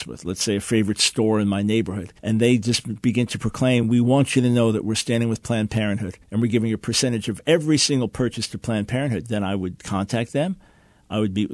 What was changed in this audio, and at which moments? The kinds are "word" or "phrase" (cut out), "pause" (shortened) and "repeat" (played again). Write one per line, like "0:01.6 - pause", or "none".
0:02.2 - pause
0:06.2 - pause

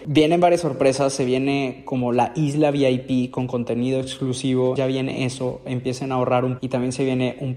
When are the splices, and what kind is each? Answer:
0:04.8 - word
0:06.6 - word

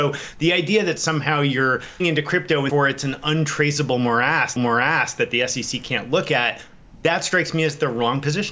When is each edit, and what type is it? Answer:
0:02.0 - word
0:02.7 - word
0:04.6 - repeat

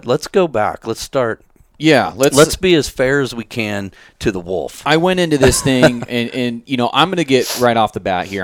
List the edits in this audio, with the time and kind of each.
none

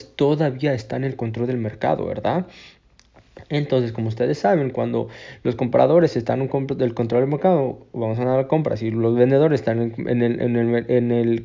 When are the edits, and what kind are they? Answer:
none

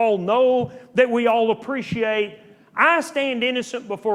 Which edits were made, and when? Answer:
none

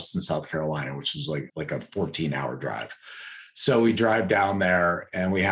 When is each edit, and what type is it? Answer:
0:01.5 - word

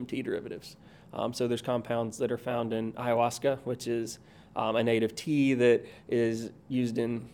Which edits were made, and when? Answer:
none

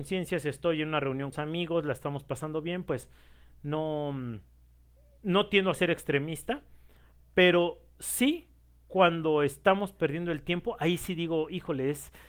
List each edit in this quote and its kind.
0:01.3 - phrase

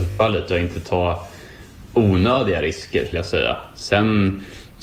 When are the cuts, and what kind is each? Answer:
0:03.1 - word

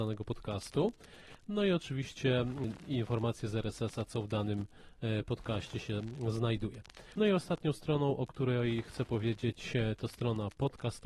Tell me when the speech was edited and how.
none

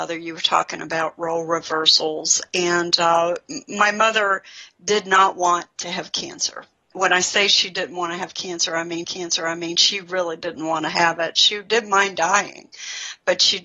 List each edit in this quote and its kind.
0:06.9 - word
0:09.0 - repeat

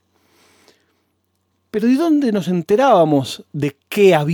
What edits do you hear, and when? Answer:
none

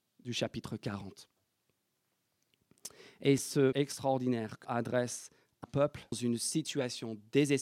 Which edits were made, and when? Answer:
0:03.4 - word
0:03.7 - word
0:04.6 - word
0:05.6 - word
0:06.1 - word

